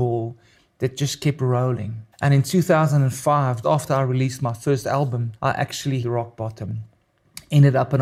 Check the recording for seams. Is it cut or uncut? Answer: cut